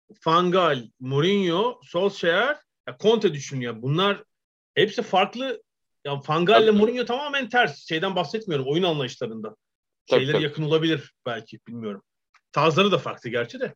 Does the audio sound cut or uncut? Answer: uncut